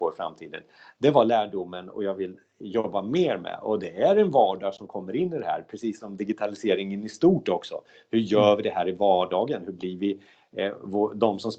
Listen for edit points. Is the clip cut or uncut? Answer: uncut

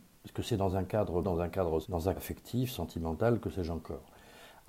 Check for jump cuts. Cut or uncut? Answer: cut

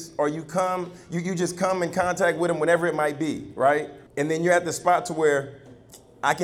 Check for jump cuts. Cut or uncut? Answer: cut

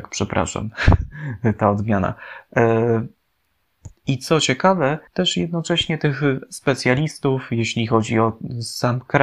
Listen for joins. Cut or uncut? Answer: cut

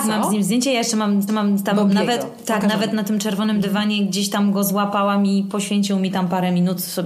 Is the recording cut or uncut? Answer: cut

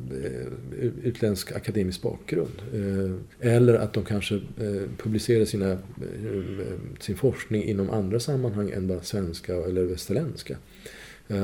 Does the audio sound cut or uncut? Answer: cut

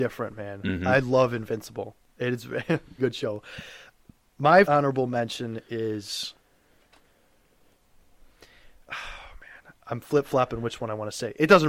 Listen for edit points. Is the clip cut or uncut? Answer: cut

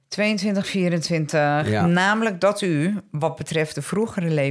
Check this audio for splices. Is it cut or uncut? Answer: uncut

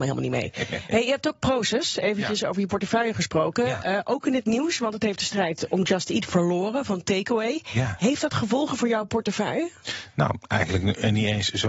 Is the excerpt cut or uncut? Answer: uncut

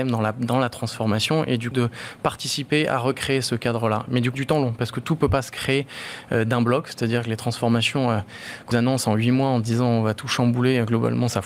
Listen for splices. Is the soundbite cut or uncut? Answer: cut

